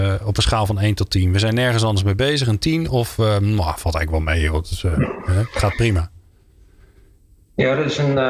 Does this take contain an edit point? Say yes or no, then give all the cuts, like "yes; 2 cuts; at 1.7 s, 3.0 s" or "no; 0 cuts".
no; 0 cuts